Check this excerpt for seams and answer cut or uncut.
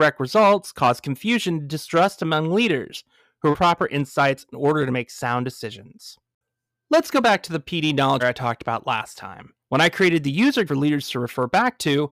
cut